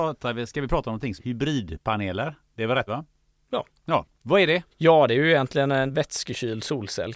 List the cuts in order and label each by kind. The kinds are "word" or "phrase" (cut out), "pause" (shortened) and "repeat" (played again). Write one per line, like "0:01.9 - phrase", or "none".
0:01.2 - word
0:02.9 - word
0:04.1 - pause
0:04.7 - pause
0:05.9 - word